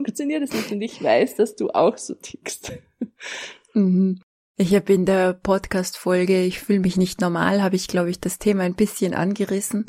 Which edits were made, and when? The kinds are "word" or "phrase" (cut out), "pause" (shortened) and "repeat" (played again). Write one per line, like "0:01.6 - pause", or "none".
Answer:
none